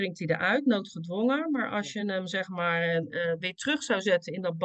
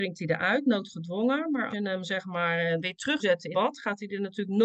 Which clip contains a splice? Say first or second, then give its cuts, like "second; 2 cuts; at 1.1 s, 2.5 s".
second; 4 cuts; at 1.7 s, 2.8 s, 3.2 s, 3.5 s